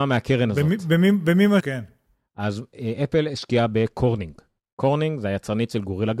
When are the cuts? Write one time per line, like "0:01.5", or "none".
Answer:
0:01.6